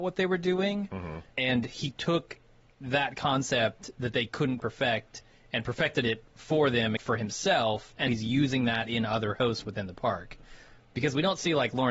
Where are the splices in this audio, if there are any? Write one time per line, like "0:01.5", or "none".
0:01.3
0:04.6
0:07.0
0:08.1